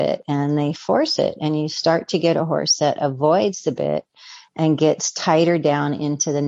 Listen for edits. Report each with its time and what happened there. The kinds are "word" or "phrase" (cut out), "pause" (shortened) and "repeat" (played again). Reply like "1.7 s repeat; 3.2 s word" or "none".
none